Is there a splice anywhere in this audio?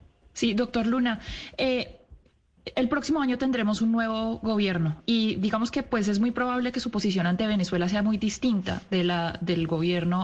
no; 0 cuts

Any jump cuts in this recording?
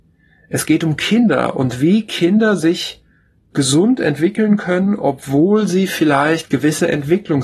no; 0 cuts

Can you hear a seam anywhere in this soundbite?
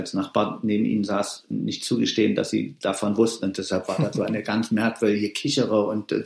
no; 0 cuts

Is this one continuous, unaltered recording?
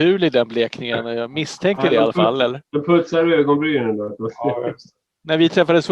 yes; 0 cuts

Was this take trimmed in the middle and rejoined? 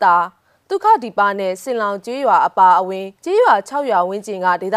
yes; 1 cut; at 3.1 s

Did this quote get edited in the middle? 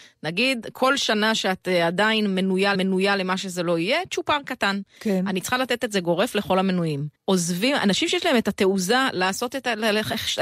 yes; 2 cuts; at 2.7 s, 7.2 s

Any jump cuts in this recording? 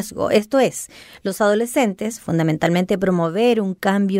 no; 0 cuts

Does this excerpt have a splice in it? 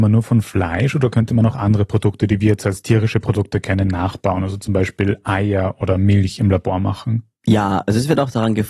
no; 0 cuts

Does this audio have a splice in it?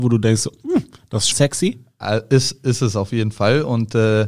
yes; 1 cut; at 1.3 s

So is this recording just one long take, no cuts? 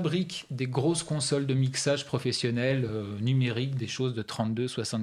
yes; 0 cuts

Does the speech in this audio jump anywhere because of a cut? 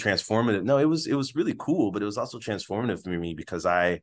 no; 0 cuts

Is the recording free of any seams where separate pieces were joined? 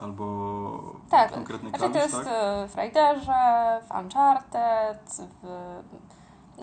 no; 2 cuts; at 1.3 s, 2.7 s

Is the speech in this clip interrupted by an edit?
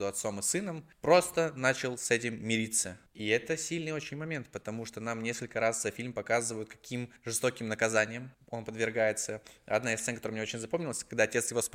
yes; 4 cuts; at 0.9 s, 3.1 s, 7.2 s, 8.3 s

